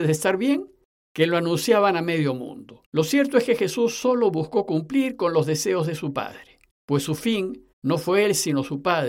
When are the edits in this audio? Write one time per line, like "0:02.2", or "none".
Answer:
0:02.8
0:06.7
0:07.7